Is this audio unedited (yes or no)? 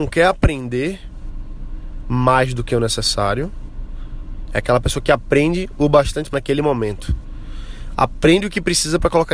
no